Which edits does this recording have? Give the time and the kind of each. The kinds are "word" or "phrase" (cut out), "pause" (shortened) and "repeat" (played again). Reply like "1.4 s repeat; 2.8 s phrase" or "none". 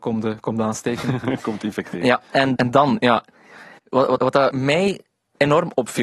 2.6 s word; 3.8 s pause; 4.2 s word